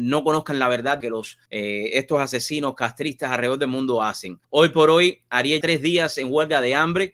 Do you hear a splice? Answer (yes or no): yes